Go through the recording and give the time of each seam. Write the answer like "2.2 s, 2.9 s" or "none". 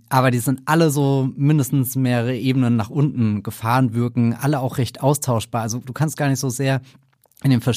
none